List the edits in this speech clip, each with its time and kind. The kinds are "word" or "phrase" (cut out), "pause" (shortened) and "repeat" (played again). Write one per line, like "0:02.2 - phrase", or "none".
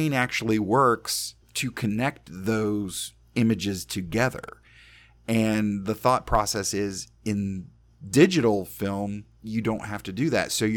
0:01.4 - pause